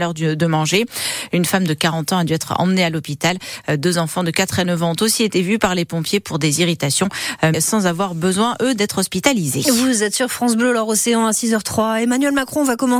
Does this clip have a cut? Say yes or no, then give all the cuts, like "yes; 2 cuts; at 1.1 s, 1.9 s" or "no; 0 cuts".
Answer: yes; 1 cut; at 7.5 s